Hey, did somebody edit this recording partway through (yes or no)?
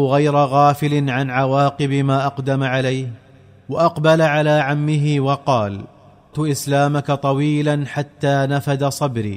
yes